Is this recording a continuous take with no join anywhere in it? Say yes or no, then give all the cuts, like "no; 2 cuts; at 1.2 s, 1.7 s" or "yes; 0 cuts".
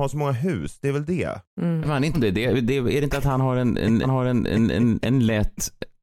no; 3 cuts; at 1.8 s, 2.1 s, 4.0 s